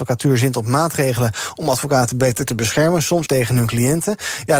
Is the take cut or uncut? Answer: cut